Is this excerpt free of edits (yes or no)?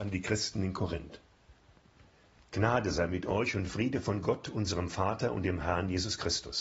yes